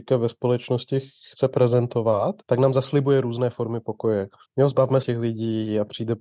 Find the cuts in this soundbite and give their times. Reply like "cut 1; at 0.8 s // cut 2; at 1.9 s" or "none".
cut 1; at 2.4 s // cut 2; at 4.4 s // cut 3; at 5.0 s